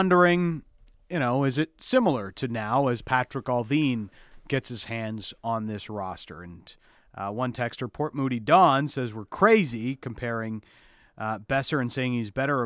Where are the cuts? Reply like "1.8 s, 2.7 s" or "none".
none